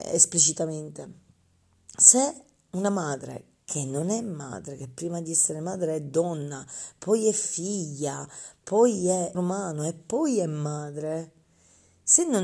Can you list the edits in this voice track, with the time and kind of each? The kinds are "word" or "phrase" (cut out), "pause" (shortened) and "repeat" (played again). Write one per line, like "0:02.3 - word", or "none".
0:09.3 - word